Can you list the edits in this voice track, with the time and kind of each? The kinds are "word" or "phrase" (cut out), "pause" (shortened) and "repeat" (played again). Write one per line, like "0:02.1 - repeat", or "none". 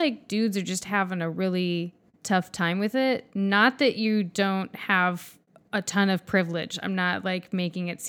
none